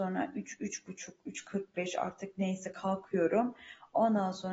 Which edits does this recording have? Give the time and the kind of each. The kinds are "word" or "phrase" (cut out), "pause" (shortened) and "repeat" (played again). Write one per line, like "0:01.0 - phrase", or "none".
none